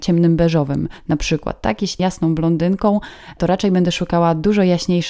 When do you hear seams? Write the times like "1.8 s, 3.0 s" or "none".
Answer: 2.0 s